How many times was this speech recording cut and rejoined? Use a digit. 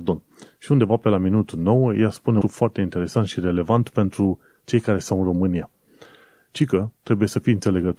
1